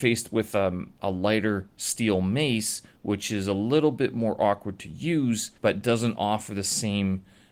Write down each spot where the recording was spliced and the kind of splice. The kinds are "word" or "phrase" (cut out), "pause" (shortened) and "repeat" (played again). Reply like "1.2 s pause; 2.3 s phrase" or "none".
5.6 s pause